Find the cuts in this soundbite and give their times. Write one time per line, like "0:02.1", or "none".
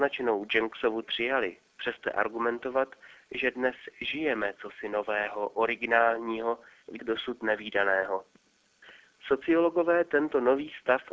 0:01.0
0:02.0
0:07.0